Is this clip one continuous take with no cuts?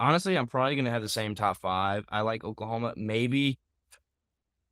yes; 0 cuts

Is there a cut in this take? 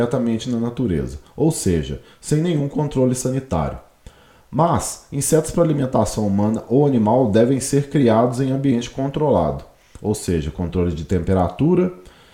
no; 0 cuts

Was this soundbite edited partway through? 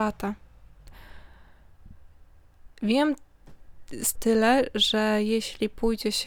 yes; 1 cut; at 4.2 s

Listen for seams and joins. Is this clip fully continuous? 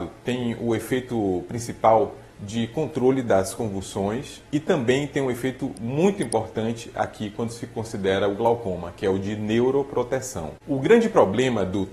no; 2 cuts; at 4.4 s, 10.6 s

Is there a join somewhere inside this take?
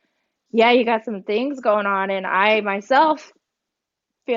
no; 0 cuts

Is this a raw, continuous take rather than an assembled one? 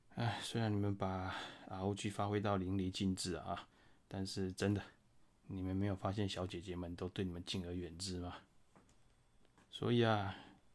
yes; 0 cuts

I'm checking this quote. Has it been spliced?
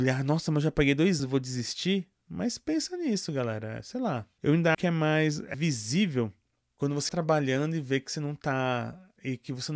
yes; 4 cuts; at 1.2 s, 4.7 s, 5.5 s, 7.1 s

